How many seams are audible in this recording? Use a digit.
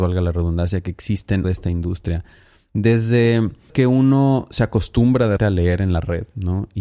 3